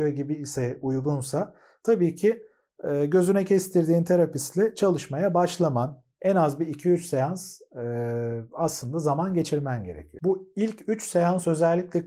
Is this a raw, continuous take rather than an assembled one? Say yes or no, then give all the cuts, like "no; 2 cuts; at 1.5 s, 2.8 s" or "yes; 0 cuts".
yes; 0 cuts